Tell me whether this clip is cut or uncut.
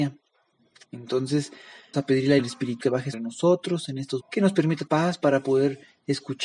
cut